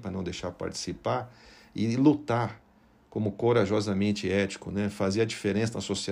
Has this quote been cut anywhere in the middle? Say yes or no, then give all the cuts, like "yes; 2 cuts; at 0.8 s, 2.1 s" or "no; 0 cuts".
no; 0 cuts